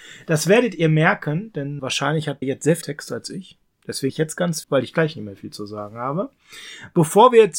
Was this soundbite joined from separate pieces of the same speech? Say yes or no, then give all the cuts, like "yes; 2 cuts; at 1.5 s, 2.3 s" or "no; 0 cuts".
yes; 5 cuts; at 1.8 s, 2.4 s, 2.8 s, 4.1 s, 4.6 s